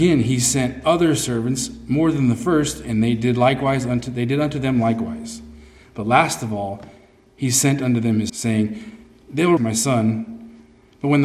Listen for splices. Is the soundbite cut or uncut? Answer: cut